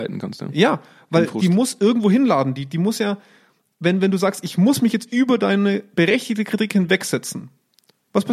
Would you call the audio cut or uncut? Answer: uncut